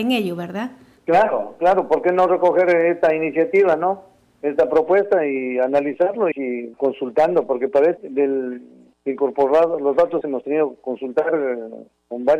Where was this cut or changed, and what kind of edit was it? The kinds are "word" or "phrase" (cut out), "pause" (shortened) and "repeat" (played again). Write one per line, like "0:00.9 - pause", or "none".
0:06.3 - word
0:06.7 - word
0:08.0 - word
0:10.2 - word

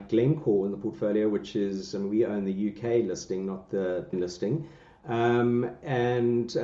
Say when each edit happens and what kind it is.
0:04.1 - phrase

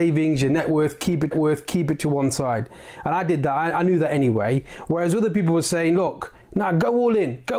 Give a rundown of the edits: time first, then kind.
0:01.3 - repeat

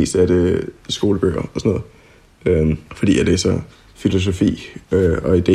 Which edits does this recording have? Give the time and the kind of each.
0:02.9 - pause
0:03.7 - pause

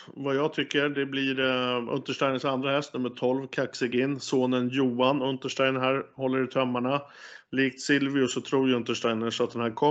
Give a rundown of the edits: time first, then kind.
none

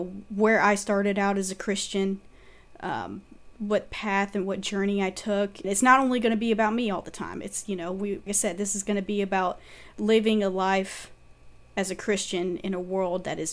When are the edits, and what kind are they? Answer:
0:03.5 - word
0:05.6 - word
0:08.3 - word

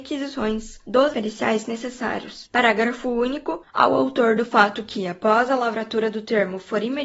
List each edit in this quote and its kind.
0:01.1 - word

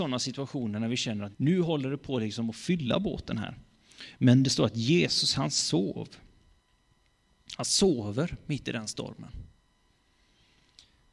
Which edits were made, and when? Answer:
0:01.3 - word

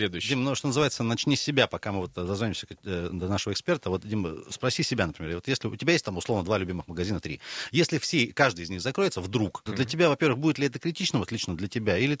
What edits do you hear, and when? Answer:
0:09.7 - word

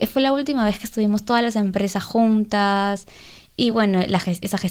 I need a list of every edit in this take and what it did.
none

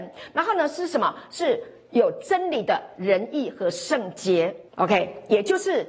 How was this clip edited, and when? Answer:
0:04.7 - pause

